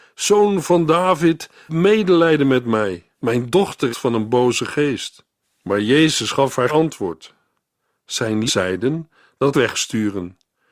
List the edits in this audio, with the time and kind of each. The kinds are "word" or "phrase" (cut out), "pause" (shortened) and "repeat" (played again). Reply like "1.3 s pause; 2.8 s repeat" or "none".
1.7 s word; 3.1 s pause; 3.9 s phrase; 5.4 s pause; 6.7 s word; 8.5 s word; 9.5 s phrase

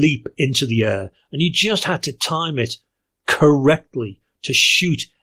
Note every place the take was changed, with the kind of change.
none

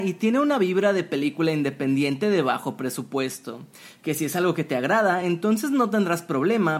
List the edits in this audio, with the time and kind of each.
none

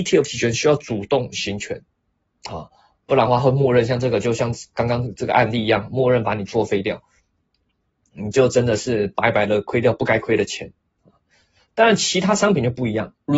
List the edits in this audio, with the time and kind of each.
none

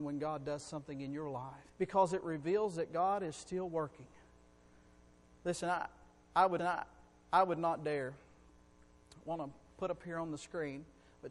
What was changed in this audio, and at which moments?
1.7 s pause; 6.6 s repeat

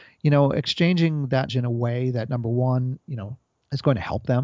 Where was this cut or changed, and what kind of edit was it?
1.5 s word; 3.0 s pause; 3.5 s pause

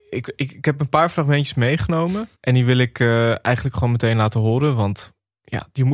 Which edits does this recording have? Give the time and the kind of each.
2.4 s pause

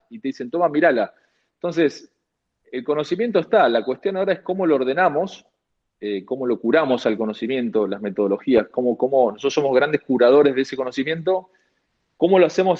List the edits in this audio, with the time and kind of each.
none

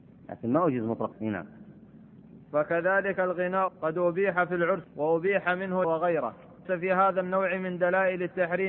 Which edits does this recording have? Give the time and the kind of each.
1.1 s word; 3.7 s word; 4.8 s word; 5.8 s word; 6.6 s word

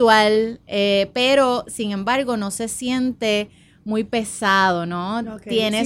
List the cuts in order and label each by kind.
none

